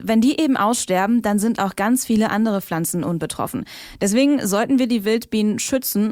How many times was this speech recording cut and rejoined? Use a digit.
1